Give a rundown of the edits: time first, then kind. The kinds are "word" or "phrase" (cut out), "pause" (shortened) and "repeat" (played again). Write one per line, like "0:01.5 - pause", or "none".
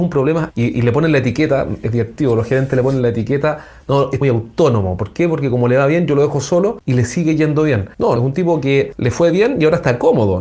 0:04.2 - phrase
0:08.2 - phrase